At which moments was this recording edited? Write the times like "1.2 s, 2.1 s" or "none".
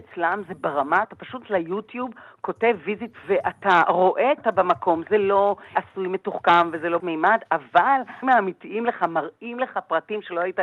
1.0 s, 1.4 s, 3.2 s, 4.4 s, 5.7 s, 7.0 s, 8.2 s, 8.8 s